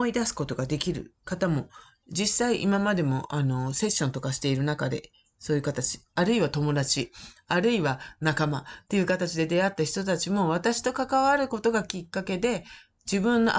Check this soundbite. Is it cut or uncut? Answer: uncut